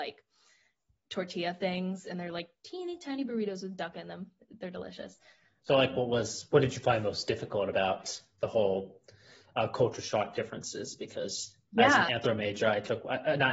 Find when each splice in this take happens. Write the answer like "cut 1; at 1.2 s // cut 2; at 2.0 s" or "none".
none